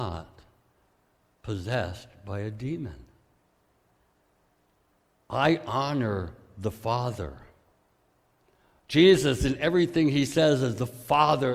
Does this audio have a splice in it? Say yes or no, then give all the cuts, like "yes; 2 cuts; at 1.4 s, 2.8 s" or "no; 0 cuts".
no; 0 cuts